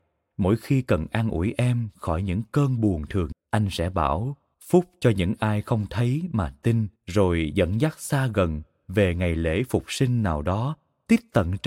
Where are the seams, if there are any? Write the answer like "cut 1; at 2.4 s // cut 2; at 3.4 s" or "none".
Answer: cut 1; at 3.3 s // cut 2; at 4.5 s // cut 3; at 7.0 s